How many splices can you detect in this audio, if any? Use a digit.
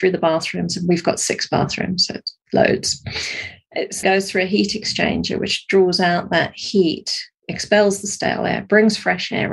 2